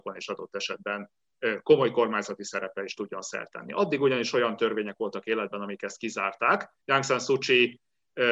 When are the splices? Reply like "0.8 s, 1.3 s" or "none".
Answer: 6.8 s